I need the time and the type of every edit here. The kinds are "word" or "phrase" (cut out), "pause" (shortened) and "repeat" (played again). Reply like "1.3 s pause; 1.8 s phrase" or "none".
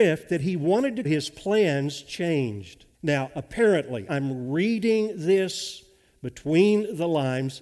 1.0 s phrase; 2.9 s pause; 4.1 s word